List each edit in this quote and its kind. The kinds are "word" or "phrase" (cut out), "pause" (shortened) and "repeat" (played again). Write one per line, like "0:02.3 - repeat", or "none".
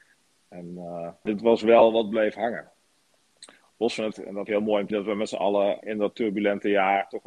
0:01.3 - word
0:04.1 - word
0:04.5 - word
0:04.9 - word
0:05.8 - word

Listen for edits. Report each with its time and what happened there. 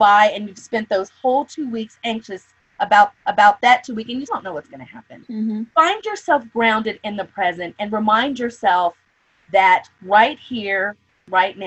0:03.1 - repeat
0:04.3 - word
0:05.2 - word

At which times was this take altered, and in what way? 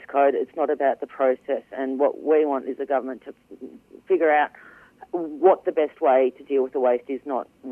none

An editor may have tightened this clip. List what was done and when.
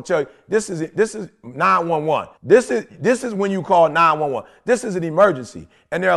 0:02.4 - pause

